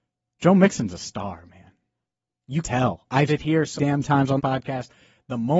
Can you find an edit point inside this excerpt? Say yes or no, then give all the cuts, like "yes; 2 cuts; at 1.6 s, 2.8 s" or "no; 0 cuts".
yes; 4 cuts; at 2.6 s, 3.3 s, 3.8 s, 4.4 s